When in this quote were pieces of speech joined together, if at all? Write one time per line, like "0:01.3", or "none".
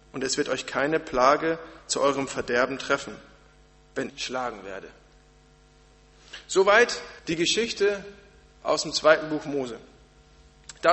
0:04.1
0:07.2